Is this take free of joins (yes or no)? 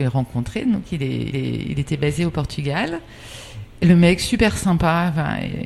no